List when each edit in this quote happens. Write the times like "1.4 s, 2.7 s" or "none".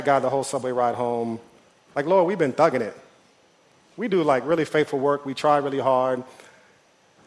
none